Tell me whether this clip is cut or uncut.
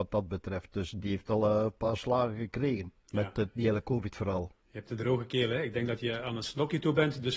cut